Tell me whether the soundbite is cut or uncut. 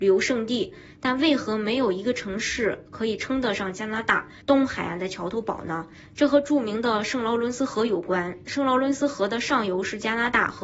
cut